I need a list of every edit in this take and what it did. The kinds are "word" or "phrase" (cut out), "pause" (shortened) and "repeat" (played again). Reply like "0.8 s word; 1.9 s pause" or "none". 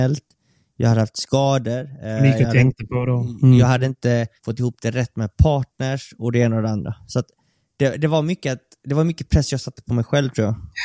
4.4 s pause